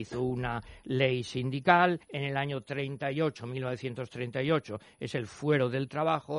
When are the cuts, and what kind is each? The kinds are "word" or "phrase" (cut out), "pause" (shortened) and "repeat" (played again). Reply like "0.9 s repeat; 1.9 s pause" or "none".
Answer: 2.0 s pause